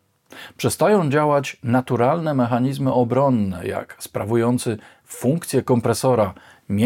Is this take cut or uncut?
uncut